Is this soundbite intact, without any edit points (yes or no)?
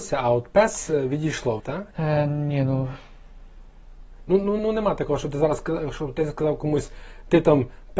no